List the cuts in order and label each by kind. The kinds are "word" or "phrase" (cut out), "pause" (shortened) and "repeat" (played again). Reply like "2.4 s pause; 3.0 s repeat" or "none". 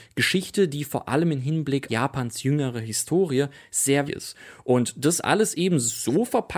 1.9 s word; 4.1 s word